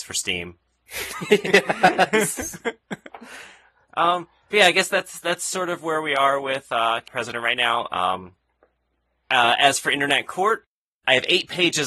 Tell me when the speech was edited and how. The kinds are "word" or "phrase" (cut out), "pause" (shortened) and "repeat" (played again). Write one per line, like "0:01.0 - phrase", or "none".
0:07.1 - word